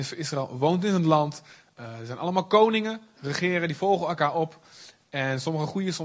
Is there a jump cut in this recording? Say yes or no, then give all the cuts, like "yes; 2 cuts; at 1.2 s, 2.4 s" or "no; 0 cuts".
no; 0 cuts